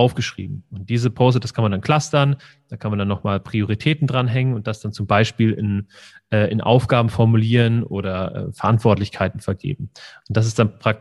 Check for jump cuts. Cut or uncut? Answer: uncut